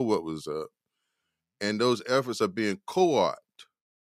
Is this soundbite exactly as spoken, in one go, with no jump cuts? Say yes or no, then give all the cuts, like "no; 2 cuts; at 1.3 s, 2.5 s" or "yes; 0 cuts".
yes; 0 cuts